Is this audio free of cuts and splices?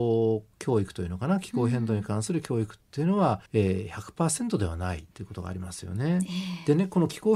no; 2 cuts; at 3.5 s, 5.1 s

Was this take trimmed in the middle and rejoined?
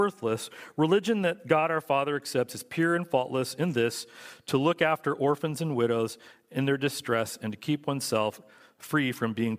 no; 0 cuts

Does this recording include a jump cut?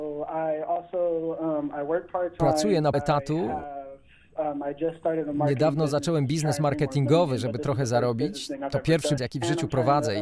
yes; 2 cuts; at 2.9 s, 9.2 s

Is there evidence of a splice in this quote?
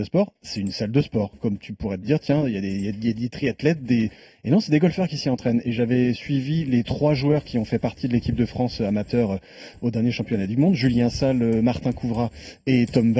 no; 0 cuts

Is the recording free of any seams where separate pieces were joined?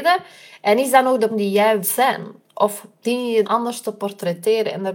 no; 3 cuts; at 1.3 s, 1.8 s, 3.4 s

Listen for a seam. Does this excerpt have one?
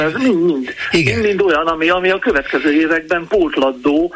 no; 0 cuts

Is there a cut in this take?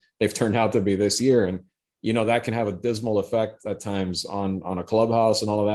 no; 0 cuts

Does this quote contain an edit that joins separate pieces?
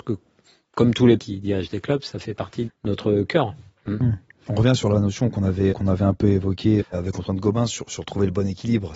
yes; 4 cuts; at 1.2 s, 2.7 s, 5.7 s, 6.8 s

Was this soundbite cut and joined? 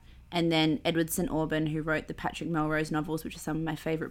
no; 0 cuts

